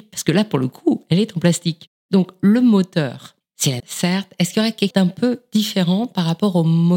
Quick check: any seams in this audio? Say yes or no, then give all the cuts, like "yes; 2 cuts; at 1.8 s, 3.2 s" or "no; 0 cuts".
yes; 3 cuts; at 2.0 s, 3.8 s, 4.9 s